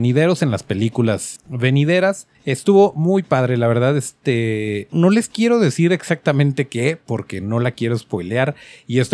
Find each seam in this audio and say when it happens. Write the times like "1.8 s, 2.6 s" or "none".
1.4 s, 2.3 s, 4.9 s